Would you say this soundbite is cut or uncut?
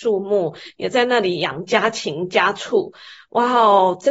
uncut